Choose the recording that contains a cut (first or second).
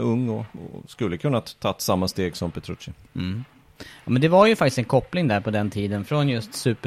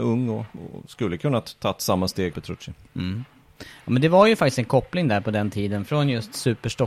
second